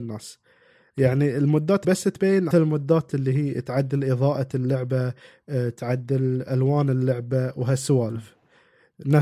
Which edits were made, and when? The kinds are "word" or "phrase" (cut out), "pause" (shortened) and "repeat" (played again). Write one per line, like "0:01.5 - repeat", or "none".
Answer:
0:01.8 - word
0:02.5 - phrase